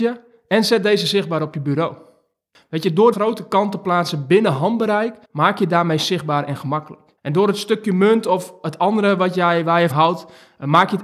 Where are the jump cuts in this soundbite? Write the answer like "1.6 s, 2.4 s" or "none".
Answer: 3.1 s, 5.2 s, 7.2 s, 9.9 s